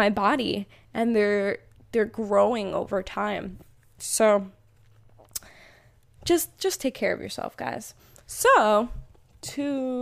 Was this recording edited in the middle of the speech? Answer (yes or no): no